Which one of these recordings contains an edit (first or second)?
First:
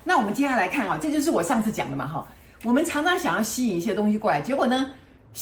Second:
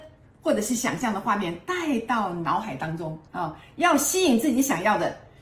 second